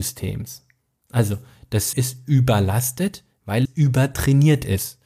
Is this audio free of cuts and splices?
no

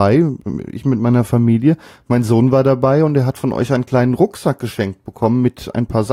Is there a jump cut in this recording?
no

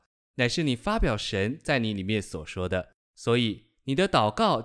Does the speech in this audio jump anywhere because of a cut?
yes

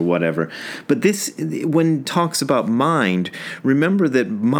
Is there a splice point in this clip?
yes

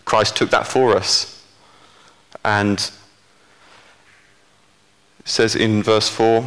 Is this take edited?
no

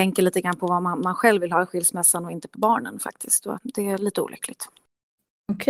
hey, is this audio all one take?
no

